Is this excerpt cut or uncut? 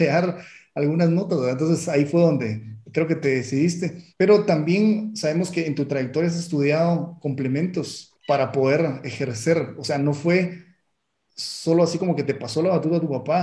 cut